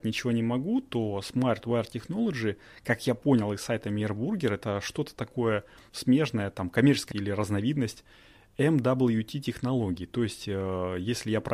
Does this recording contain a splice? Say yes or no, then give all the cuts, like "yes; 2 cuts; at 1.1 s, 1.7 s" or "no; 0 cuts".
yes; 2 cuts; at 5.9 s, 7.1 s